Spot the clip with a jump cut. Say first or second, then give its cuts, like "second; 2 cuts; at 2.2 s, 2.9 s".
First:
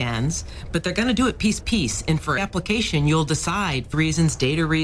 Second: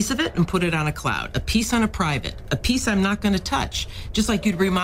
first; 3 cuts; at 1.6 s, 2.4 s, 3.9 s